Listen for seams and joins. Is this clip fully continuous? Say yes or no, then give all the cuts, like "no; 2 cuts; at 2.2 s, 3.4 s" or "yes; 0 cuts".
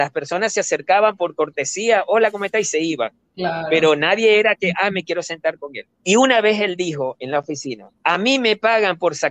no; 2 cuts; at 5.9 s, 8.0 s